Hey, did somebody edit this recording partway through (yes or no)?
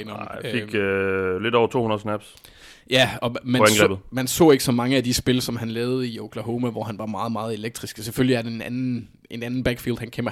no